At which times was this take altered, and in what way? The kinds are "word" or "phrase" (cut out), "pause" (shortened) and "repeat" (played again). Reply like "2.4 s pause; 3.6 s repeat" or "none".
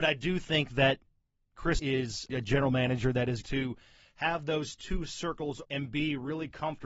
1.8 s word; 3.4 s word; 5.6 s word